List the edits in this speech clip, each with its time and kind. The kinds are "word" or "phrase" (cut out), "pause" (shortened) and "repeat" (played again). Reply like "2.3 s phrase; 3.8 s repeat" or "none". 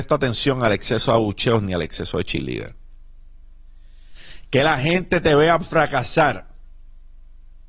none